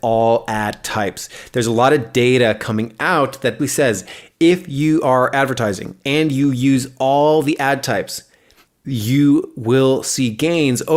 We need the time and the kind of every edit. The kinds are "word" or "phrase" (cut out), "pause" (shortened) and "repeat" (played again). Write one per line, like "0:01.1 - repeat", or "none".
0:03.6 - word
0:08.7 - pause